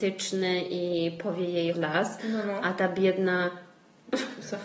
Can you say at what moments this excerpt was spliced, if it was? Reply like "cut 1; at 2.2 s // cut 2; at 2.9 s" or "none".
cut 1; at 1.7 s